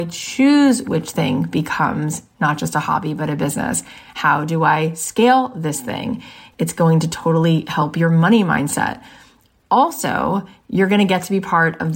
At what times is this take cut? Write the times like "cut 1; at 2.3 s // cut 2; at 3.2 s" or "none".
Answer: none